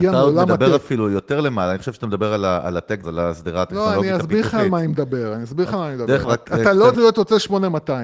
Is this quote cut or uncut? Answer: cut